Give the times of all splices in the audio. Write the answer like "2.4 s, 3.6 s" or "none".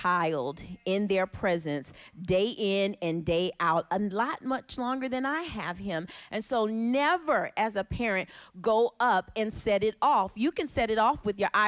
none